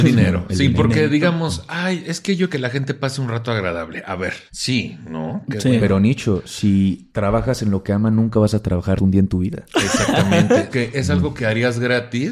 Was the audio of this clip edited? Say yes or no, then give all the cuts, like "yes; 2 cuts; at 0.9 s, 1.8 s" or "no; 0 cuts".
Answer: yes; 5 cuts; at 2.5 s, 4.5 s, 7.1 s, 9.0 s, 10.7 s